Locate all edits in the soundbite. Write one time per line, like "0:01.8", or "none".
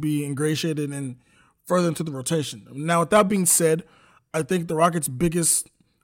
none

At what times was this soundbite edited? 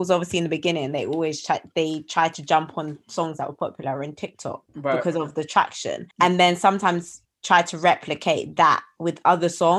0:04.7
0:06.1
0:07.2

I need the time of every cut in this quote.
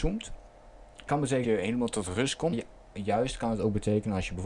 0:01.1
0:01.4
0:02.5

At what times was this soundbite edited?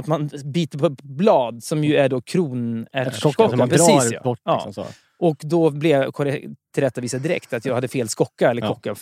none

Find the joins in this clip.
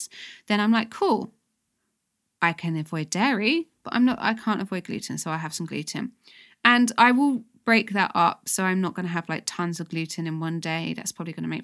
none

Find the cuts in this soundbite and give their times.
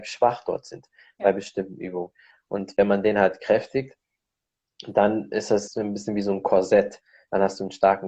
0:05.7

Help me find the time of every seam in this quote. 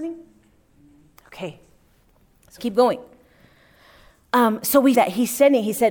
0:02.6
0:04.9

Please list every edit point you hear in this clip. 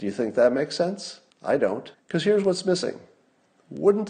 0:01.3
0:01.9

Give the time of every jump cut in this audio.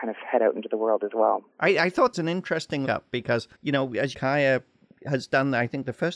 0:01.5
0:02.1
0:02.9
0:03.5
0:04.1

